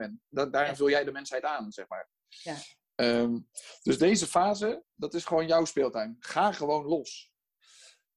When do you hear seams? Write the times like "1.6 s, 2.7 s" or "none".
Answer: none